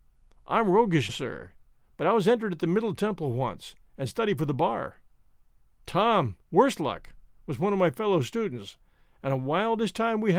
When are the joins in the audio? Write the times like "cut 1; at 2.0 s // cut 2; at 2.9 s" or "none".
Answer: cut 1; at 1.1 s // cut 2; at 6.4 s